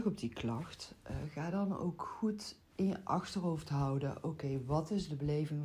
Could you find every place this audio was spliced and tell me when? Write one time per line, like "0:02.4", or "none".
0:02.6